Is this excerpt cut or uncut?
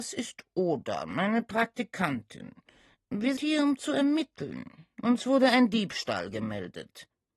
cut